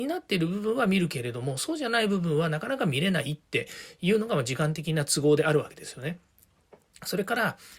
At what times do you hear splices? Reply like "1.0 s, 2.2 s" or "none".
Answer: 3.4 s